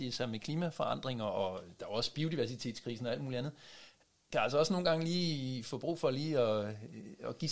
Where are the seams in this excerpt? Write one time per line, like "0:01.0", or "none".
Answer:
none